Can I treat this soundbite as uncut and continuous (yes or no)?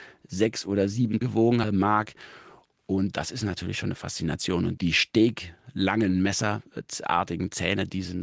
no